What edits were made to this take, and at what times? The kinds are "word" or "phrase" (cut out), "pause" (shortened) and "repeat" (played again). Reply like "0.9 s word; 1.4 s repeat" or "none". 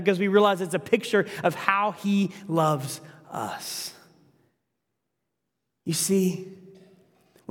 none